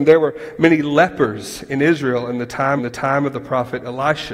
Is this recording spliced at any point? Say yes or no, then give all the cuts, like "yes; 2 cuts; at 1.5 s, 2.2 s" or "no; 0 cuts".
yes; 1 cut; at 2.8 s